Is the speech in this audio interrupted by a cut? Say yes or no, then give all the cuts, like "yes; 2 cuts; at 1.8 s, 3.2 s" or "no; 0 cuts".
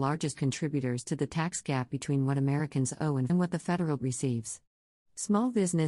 yes; 2 cuts; at 3.3 s, 4.0 s